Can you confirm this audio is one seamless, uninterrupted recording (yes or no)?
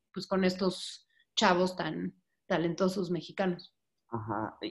yes